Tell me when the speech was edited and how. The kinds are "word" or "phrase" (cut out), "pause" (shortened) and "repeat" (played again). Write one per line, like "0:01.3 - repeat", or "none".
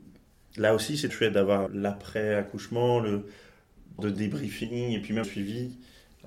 0:01.1 - word
0:01.7 - word
0:04.0 - word
0:05.2 - word